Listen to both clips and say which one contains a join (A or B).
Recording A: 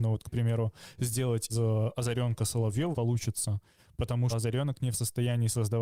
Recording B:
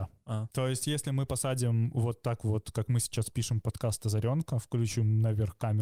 A